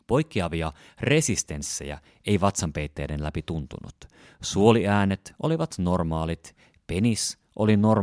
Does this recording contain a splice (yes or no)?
no